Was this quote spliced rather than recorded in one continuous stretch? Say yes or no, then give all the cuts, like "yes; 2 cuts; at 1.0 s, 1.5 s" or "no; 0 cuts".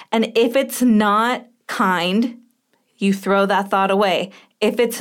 no; 0 cuts